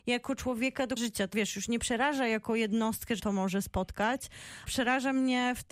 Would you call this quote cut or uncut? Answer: cut